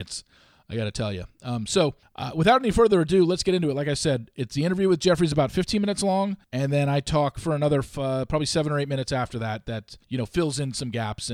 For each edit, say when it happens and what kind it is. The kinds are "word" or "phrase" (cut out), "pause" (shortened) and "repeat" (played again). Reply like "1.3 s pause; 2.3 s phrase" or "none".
2.0 s pause; 6.4 s pause; 10.0 s pause